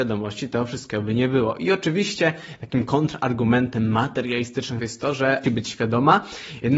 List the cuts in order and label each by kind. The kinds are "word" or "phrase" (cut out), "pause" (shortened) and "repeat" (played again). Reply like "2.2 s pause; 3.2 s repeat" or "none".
4.8 s word; 5.4 s phrase